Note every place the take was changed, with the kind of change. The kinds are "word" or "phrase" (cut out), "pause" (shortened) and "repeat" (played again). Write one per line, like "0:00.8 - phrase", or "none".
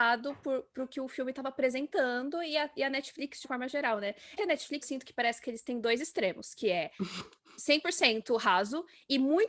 0:03.4 - word
0:04.4 - word
0:04.8 - word